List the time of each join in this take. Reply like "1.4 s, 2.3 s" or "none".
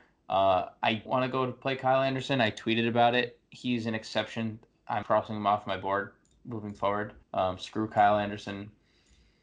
1.1 s, 5.0 s, 7.2 s